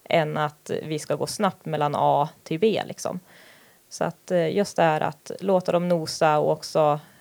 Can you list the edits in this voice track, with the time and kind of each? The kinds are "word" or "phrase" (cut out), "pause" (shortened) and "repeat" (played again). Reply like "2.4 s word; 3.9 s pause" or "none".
none